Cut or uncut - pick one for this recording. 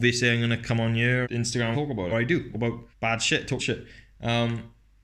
cut